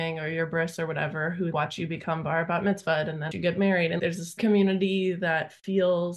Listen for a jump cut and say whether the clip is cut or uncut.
cut